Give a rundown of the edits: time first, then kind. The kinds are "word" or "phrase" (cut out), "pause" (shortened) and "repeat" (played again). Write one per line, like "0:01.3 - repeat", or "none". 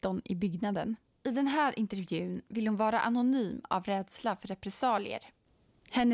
none